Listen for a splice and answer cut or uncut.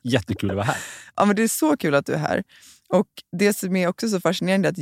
uncut